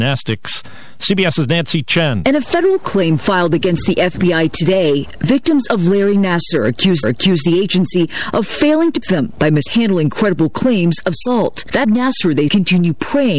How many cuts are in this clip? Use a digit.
5